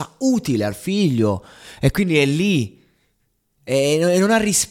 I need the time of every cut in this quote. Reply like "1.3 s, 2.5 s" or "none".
none